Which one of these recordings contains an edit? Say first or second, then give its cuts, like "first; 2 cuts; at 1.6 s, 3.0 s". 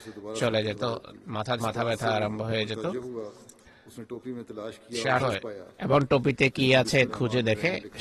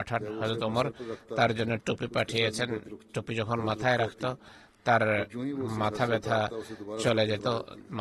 first; 3 cuts; at 1.6 s, 5.2 s, 7.1 s